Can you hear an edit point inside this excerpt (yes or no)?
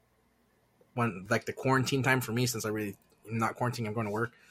no